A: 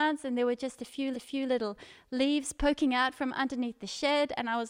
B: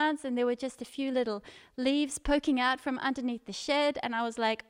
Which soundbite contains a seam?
A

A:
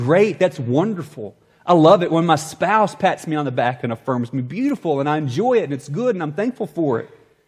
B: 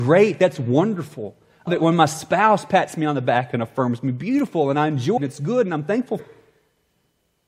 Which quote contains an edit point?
B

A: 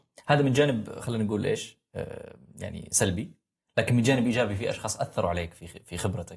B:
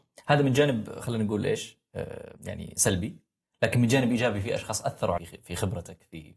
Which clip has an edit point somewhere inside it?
B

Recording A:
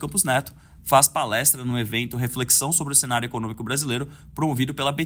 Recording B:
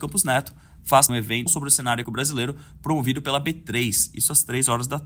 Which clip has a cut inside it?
B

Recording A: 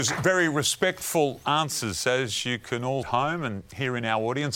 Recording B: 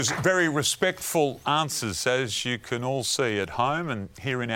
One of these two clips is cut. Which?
A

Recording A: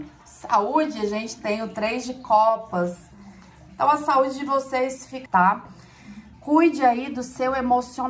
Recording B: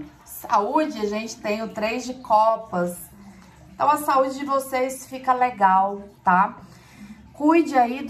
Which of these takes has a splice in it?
A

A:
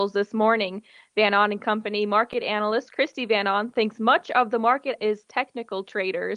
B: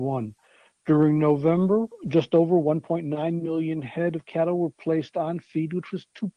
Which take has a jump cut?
A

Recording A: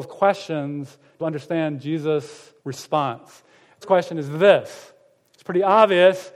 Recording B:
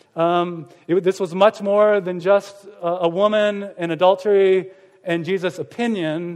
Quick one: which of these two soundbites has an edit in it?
A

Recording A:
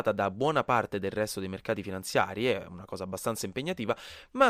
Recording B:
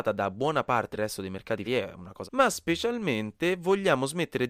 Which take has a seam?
B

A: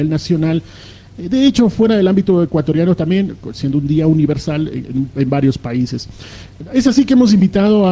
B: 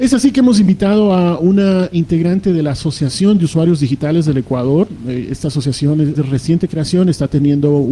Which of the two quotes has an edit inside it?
B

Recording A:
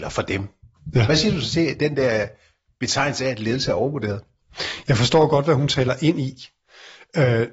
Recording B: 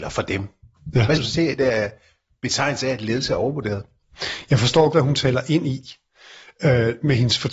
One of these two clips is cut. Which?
B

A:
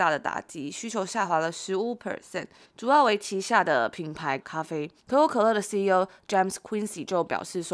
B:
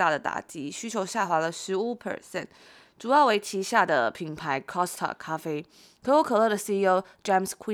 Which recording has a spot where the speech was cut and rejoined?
A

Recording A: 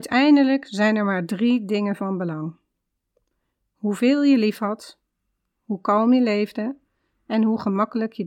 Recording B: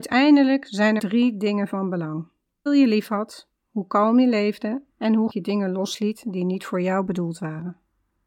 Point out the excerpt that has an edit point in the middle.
B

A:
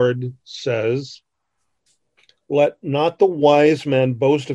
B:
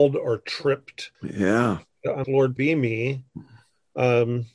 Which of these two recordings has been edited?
B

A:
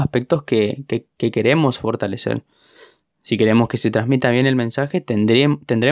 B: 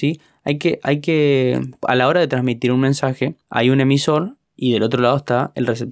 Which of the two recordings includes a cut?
B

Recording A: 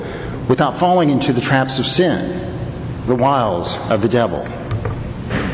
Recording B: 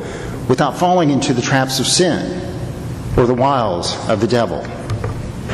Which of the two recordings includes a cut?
A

